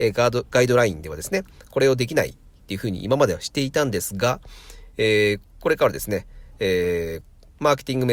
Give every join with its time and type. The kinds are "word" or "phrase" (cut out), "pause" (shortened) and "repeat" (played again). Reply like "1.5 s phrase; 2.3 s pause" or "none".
none